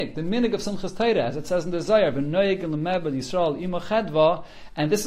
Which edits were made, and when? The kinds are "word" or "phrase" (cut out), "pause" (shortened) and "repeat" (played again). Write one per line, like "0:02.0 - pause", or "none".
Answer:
none